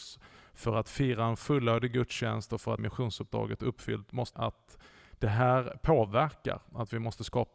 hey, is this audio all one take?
no; 2 cuts; at 2.8 s, 4.3 s

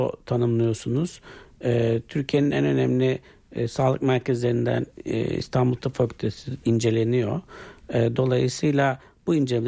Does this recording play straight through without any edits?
no; 1 cut; at 6.6 s

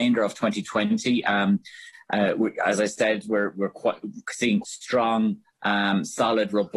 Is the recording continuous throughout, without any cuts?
no; 1 cut; at 4.6 s

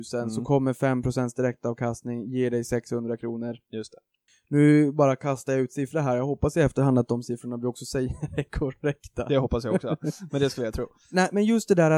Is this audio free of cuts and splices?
yes; 0 cuts

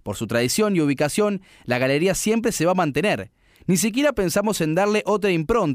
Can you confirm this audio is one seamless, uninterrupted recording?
yes; 0 cuts

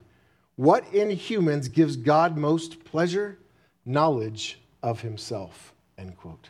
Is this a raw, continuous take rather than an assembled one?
yes; 0 cuts

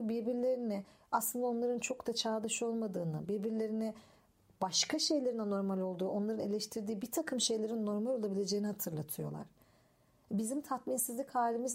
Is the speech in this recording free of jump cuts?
yes; 0 cuts

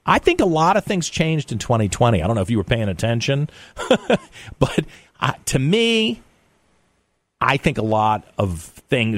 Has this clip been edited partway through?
no; 0 cuts

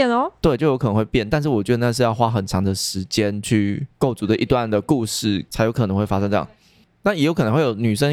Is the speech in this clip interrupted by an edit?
no; 0 cuts

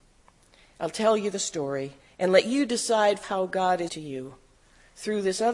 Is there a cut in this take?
yes; 3 cuts; at 2.0 s, 3.2 s, 3.9 s

